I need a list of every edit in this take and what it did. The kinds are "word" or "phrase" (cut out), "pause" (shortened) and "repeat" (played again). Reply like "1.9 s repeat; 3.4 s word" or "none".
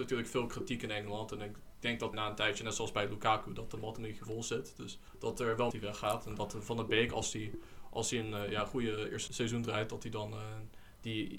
2.1 s word; 5.1 s pause; 5.7 s phrase; 9.3 s word